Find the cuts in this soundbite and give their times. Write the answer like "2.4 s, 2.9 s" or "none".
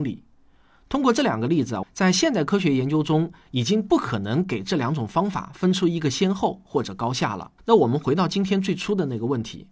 1.8 s, 7.6 s